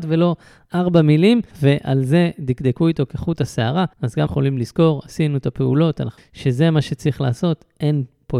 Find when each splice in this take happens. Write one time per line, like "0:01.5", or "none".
0:01.5
0:03.9
0:04.3
0:06.2